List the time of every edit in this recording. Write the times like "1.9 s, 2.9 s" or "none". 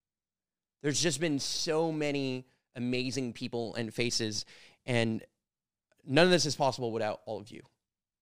none